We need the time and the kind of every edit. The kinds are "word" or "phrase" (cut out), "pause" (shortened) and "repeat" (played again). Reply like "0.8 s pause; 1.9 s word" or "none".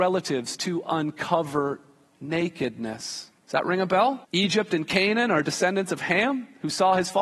3.4 s pause; 4.2 s pause